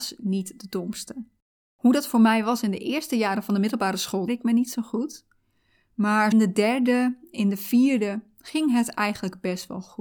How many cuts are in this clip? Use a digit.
3